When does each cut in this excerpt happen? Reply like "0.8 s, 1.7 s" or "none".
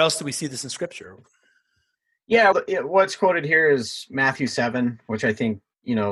2.5 s